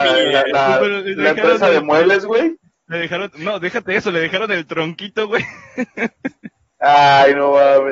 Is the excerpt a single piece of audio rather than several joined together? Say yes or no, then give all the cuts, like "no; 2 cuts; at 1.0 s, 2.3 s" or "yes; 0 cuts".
yes; 0 cuts